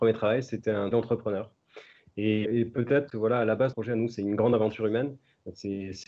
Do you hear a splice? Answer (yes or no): yes